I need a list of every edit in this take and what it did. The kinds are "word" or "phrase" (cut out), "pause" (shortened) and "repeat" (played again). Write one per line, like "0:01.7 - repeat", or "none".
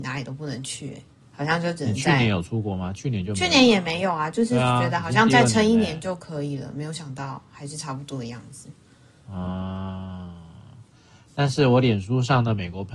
none